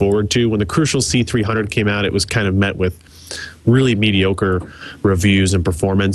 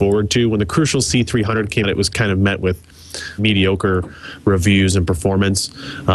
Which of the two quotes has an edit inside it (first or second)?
second